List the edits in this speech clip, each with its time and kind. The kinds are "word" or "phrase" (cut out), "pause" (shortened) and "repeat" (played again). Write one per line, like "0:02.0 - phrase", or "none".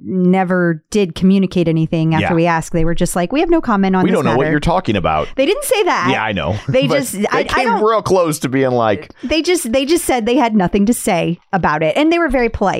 none

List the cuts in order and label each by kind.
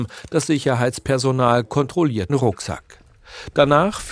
0:02.3 - word

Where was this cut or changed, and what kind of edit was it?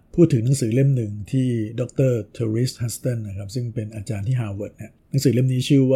0:05.0 - pause

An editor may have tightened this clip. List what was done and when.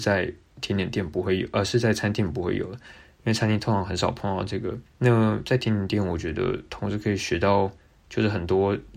0:04.9 - pause

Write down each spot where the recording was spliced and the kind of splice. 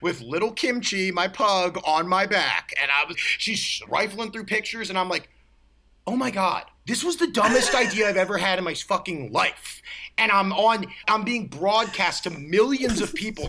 0:03.1 - word
0:03.9 - word
0:06.8 - pause
0:11.0 - word

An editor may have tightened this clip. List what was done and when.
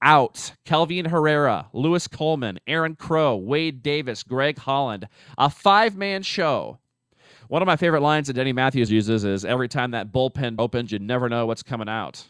0:08.9 - word
0:10.6 - word

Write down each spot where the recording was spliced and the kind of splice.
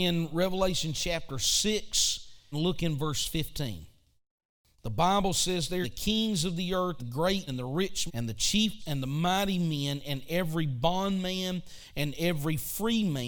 0:02.5 - word
0:05.8 - word
0:07.0 - word
0:07.5 - word
0:08.1 - word
0:08.8 - word

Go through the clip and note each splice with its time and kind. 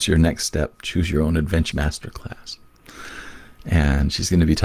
0:01.7 - word

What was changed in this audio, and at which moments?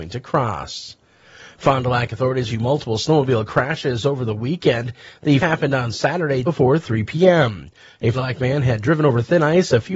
0:02.5 - word
0:05.4 - word
0:06.4 - word
0:08.1 - word

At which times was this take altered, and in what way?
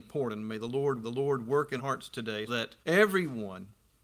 0:01.0 - repeat
0:01.8 - word
0:02.5 - word
0:02.8 - pause

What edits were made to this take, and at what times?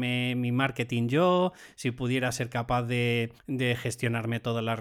0:03.4 - pause

